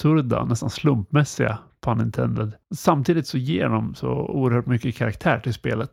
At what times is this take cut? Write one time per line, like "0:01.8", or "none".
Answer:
0:02.6